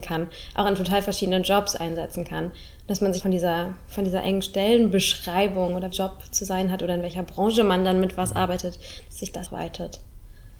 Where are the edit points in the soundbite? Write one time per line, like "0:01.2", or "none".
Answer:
0:03.2
0:05.9
0:09.5